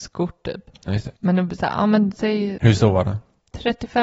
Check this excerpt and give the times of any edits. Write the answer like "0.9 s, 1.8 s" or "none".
1.2 s